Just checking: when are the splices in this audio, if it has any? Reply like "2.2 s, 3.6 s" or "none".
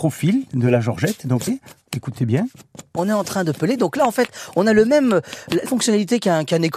1.5 s, 5.7 s

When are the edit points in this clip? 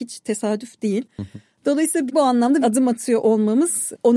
2.1 s, 2.6 s

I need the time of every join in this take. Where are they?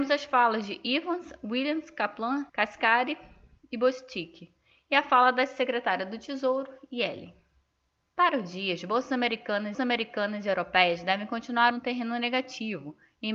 2.5 s, 7.8 s, 9.7 s, 11.7 s

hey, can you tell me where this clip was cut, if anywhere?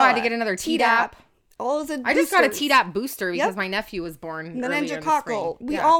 none

